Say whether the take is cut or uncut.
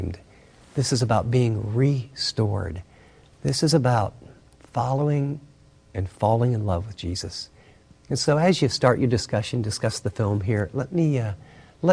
uncut